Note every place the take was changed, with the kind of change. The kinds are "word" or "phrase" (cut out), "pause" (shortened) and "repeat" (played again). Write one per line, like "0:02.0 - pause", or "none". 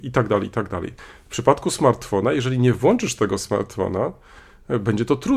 none